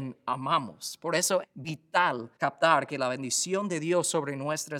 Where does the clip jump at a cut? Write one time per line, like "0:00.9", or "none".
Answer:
0:01.4
0:02.4